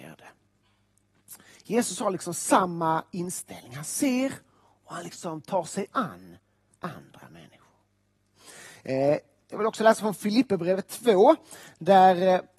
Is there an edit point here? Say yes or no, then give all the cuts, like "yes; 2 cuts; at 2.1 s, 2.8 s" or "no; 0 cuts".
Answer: no; 0 cuts